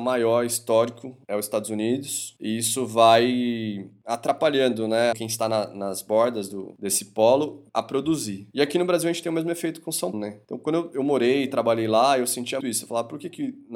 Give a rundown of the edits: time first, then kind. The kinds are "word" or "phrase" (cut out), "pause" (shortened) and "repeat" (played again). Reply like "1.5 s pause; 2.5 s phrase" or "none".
5.1 s phrase; 7.7 s pause; 10.1 s word; 12.6 s word